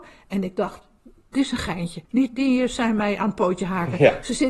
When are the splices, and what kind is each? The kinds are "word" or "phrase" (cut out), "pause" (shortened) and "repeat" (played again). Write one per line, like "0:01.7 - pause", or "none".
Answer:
0:02.0 - pause

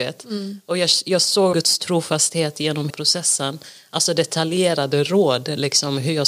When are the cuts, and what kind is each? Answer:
0:01.5 - word
0:02.9 - word

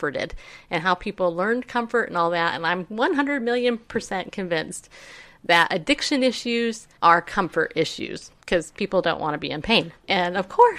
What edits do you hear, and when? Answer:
0:07.0 - pause
0:08.4 - pause

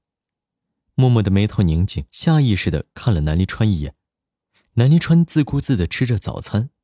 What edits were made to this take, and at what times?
0:02.1 - pause

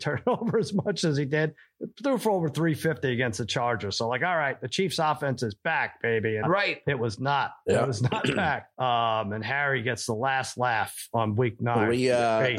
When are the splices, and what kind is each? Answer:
0:06.4 - word
0:08.7 - pause

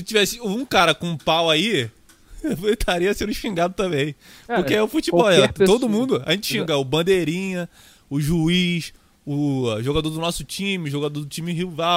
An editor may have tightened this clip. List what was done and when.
none

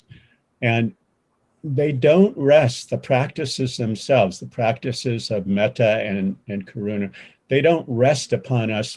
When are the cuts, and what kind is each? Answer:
none

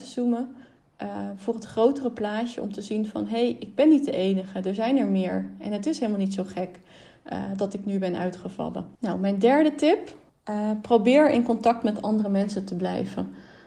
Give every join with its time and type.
0:09.0 - pause
0:10.3 - pause

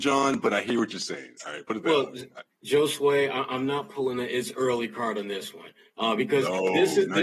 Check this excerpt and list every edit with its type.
none

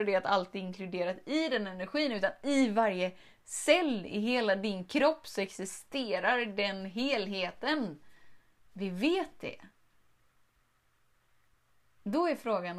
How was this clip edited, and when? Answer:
0:08.6 - pause

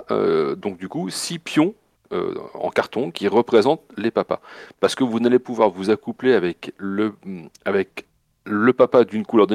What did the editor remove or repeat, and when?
none

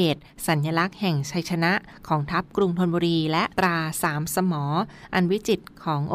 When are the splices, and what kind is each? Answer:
0:03.5 - pause

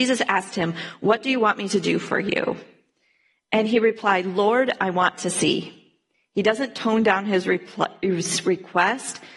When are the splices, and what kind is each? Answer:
none

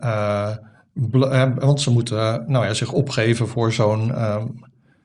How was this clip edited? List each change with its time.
none

